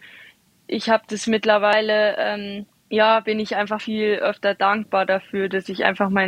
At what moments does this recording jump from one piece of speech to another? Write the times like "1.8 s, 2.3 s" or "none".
3.8 s